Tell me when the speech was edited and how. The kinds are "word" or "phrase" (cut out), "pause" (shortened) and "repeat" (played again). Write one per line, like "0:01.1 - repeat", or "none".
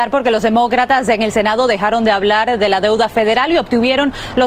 none

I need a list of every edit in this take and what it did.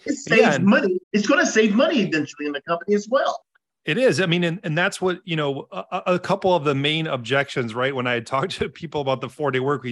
0:01.0 - pause
0:03.5 - pause

